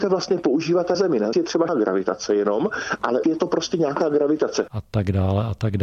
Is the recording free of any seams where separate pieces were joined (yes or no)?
no